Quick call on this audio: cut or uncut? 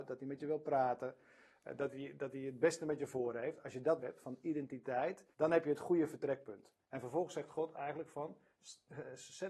cut